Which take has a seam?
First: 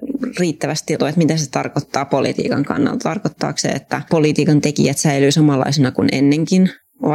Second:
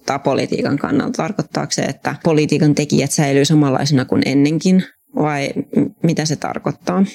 first; 1 cut; at 1.0 s

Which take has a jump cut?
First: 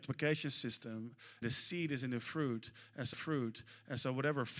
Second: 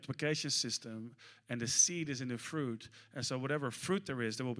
first; 2 cuts; at 1.4 s, 3.1 s

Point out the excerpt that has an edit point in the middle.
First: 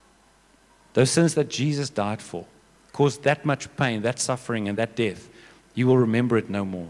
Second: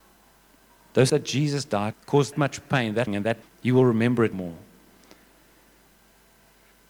second; 6 cuts; at 1.1 s, 1.9 s, 2.3 s, 3.1 s, 3.4 s, 4.3 s

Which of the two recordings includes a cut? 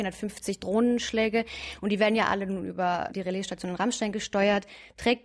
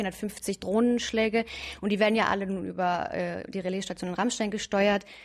first; 1 cut; at 3.1 s

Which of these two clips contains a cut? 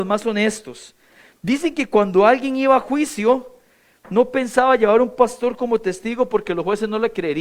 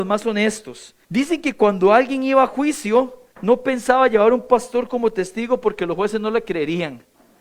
second; 2 cuts; at 1.0 s, 3.3 s

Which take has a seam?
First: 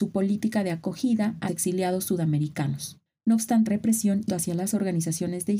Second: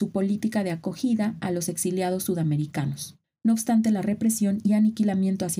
first; 3 cuts; at 1.5 s, 3.7 s, 4.3 s

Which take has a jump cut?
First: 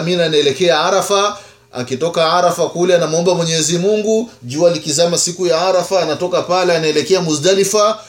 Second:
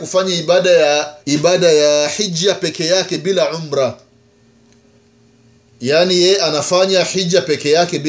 second; 1 cut; at 1.2 s

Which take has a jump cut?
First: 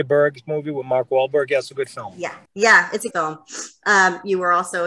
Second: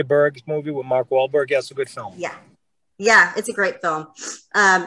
first; 2 cuts; at 2.5 s, 3.1 s

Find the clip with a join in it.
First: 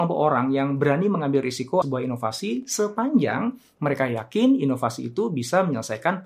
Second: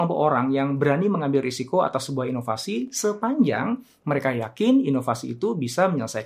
first; 1 cut; at 1.8 s

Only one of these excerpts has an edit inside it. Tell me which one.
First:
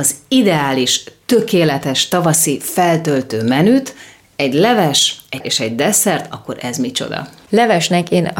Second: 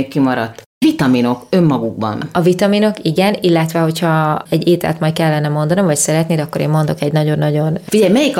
first; 1 cut; at 5.4 s

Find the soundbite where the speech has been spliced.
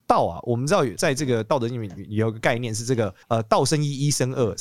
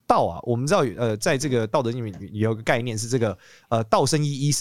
first; 2 cuts; at 1.0 s, 3.2 s

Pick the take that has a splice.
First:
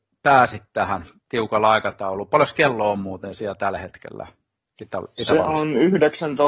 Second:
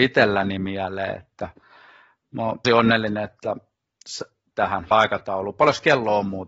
second; 3 cuts; at 2.6 s, 4.5 s, 4.9 s

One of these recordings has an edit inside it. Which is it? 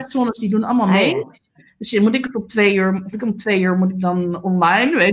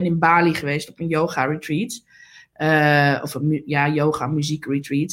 first; 1 cut; at 3.1 s

